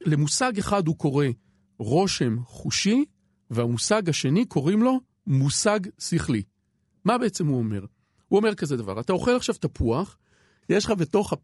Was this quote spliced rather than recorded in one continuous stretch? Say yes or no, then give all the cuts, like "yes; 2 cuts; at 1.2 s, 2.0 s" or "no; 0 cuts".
no; 0 cuts